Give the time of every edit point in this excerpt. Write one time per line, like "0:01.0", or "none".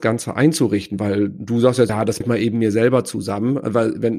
0:01.9
0:02.2